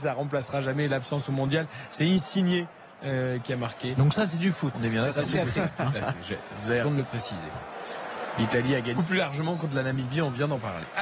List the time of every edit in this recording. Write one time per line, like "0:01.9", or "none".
0:04.7
0:06.8
0:09.0